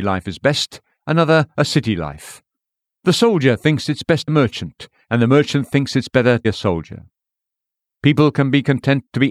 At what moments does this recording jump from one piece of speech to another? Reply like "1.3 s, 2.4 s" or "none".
4.3 s, 6.4 s

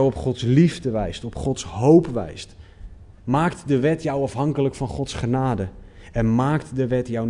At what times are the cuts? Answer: 3.1 s

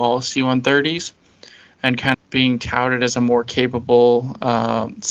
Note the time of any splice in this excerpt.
2.1 s

